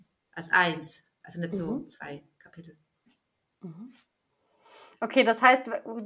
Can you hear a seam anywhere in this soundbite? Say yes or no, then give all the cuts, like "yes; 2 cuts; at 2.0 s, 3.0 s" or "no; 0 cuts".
yes; 1 cut; at 1.1 s